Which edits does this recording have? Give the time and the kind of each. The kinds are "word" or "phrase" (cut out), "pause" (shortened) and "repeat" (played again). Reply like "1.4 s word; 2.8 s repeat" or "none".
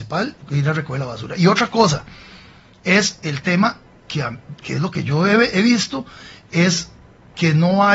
none